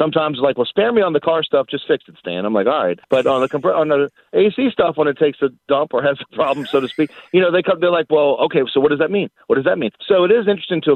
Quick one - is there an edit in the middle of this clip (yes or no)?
yes